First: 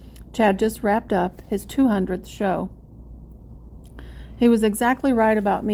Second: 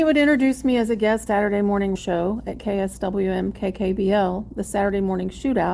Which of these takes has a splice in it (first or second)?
second